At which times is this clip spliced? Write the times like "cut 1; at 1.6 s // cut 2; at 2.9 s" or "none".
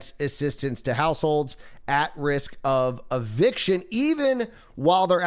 none

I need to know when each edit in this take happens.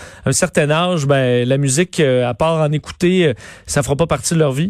none

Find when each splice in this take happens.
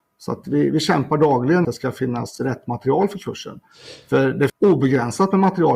cut 1; at 1.6 s // cut 2; at 4.5 s

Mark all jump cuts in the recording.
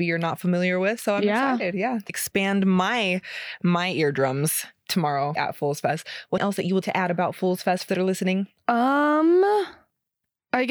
cut 1; at 2.1 s // cut 2; at 5.4 s // cut 3; at 6.4 s // cut 4; at 6.8 s // cut 5; at 7.9 s

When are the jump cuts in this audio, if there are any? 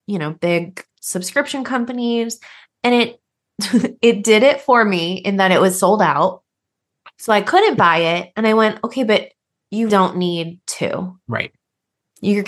cut 1; at 0.9 s // cut 2; at 9.9 s // cut 3; at 11.2 s

